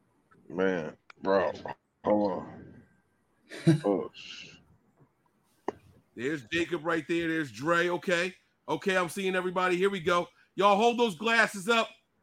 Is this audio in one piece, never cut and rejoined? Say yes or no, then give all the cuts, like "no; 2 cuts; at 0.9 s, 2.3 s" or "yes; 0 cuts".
yes; 0 cuts